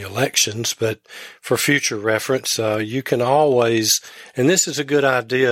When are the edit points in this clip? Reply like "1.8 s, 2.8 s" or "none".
none